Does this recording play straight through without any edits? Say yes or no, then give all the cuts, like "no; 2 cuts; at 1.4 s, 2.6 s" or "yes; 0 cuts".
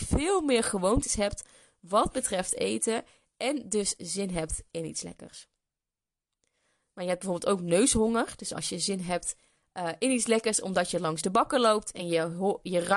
yes; 0 cuts